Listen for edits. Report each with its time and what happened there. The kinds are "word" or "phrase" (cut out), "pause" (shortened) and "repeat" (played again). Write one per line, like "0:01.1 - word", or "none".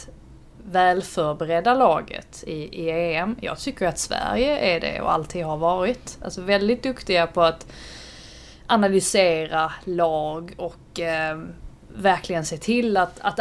none